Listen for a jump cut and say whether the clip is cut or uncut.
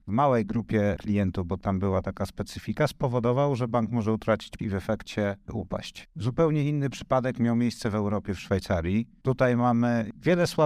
cut